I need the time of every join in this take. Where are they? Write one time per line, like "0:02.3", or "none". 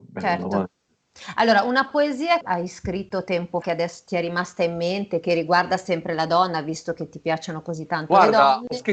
0:02.4
0:03.6